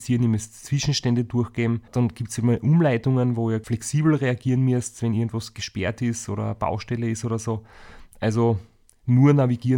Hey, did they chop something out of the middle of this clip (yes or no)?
no